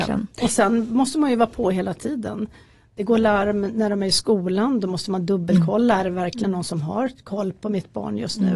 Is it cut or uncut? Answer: uncut